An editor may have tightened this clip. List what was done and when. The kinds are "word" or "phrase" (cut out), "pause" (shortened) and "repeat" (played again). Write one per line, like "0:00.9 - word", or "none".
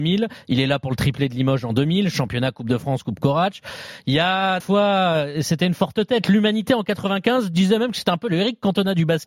0:04.6 - word

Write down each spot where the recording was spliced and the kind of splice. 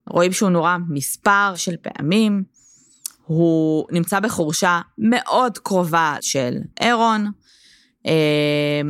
0:01.5 - word
0:06.2 - word
0:06.7 - pause

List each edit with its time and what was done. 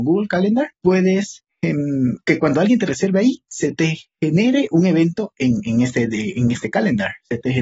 none

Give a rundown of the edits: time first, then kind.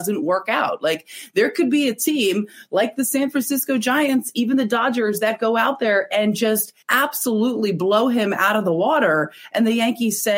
0:06.8 - pause

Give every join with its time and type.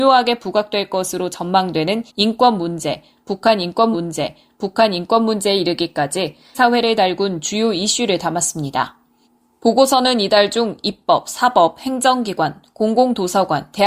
0:02.1 - pause
0:03.9 - repeat
0:06.5 - phrase
0:09.2 - pause

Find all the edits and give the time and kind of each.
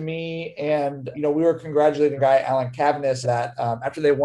0:01.1 - word
0:02.2 - word
0:03.2 - word

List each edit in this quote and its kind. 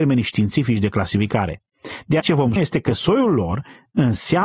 0:02.2 - word
0:02.6 - word

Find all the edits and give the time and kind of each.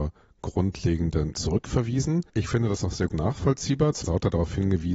0:01.3 - word
0:02.3 - pause
0:03.1 - word
0:04.0 - phrase

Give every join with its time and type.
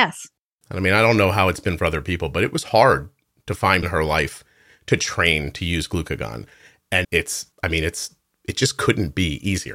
0:03.8 - phrase
0:07.0 - word
0:07.5 - pause

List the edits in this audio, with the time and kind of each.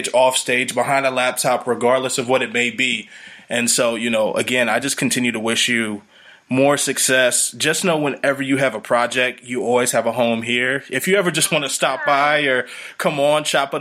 none

